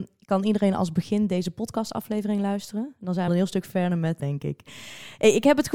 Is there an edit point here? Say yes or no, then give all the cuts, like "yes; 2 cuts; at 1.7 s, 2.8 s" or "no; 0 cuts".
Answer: yes; 2 cuts; at 3.3 s, 4.2 s